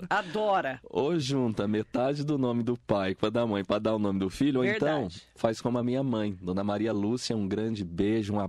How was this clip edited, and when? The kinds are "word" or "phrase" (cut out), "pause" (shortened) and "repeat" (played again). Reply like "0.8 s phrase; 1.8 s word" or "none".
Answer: none